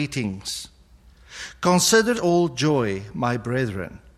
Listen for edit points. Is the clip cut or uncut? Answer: cut